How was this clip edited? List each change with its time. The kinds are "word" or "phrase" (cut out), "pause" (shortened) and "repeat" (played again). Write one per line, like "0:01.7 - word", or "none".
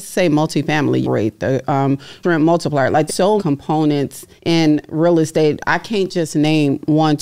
0:01.0 - phrase
0:02.2 - word
0:03.1 - word
0:03.4 - phrase
0:04.4 - pause